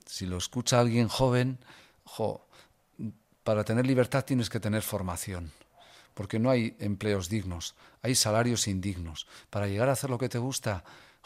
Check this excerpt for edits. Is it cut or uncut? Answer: uncut